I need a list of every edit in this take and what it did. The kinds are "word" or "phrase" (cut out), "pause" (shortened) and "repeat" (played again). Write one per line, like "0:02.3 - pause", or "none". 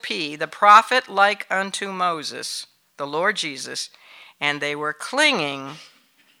none

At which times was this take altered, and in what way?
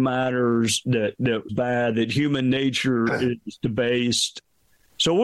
0:01.5 - phrase

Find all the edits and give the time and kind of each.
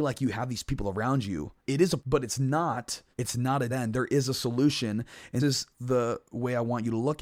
0:01.6 - pause
0:02.0 - word
0:03.1 - pause
0:03.7 - word
0:05.4 - word
0:05.7 - pause

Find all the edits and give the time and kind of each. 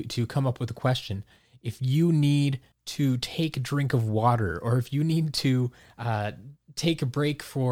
none

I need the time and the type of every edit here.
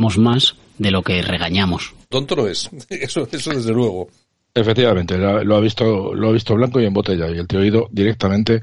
0:02.1 - word

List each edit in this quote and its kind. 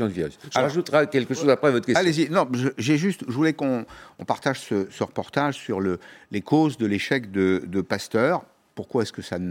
none

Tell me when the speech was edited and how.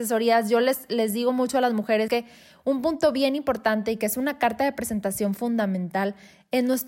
0:02.1 - word

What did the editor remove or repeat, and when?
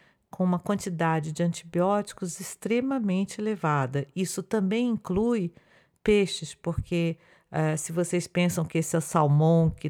none

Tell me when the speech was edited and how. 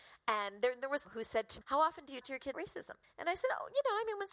0:01.0 - phrase
0:01.6 - word
0:02.2 - word
0:02.5 - word
0:03.0 - pause

